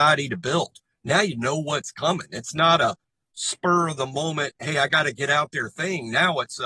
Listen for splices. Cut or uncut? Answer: uncut